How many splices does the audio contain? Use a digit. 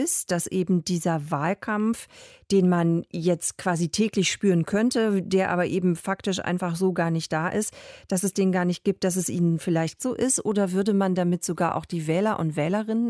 1